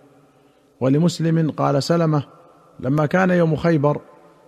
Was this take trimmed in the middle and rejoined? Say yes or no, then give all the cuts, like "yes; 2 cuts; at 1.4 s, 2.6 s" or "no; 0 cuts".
no; 0 cuts